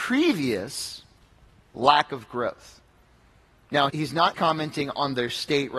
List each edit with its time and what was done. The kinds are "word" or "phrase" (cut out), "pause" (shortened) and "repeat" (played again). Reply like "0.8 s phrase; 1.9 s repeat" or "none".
1.2 s pause; 3.9 s word; 4.3 s word